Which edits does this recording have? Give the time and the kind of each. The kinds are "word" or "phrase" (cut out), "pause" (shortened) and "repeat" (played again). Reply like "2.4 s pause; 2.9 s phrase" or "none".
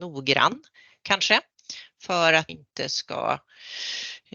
2.5 s word